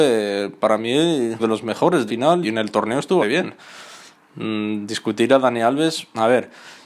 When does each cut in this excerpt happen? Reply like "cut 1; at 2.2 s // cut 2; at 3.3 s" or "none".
cut 1; at 1.4 s // cut 2; at 2.1 s // cut 3; at 2.4 s // cut 4; at 3.2 s